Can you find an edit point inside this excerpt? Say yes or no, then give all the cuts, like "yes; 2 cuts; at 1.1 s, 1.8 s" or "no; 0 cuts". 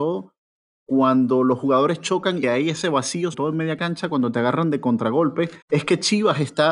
yes; 3 cuts; at 2.4 s, 3.3 s, 5.6 s